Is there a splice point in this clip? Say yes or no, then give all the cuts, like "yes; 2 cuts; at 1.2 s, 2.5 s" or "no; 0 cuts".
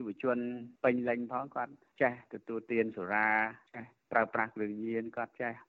no; 0 cuts